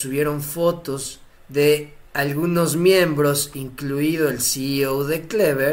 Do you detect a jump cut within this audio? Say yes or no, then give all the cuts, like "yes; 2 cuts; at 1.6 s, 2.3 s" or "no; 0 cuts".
yes; 1 cut; at 1.4 s